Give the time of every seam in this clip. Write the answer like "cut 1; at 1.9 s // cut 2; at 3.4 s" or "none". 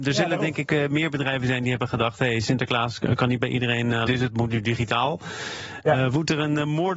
cut 1; at 4.1 s